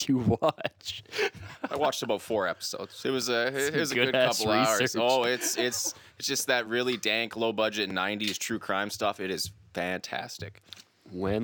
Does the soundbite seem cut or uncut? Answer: uncut